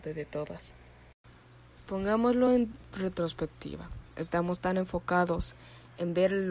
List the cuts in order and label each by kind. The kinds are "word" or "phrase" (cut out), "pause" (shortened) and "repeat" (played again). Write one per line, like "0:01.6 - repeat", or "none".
none